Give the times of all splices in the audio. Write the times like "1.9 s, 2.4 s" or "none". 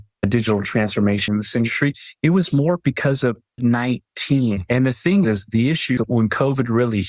1.3 s, 3.6 s, 6.0 s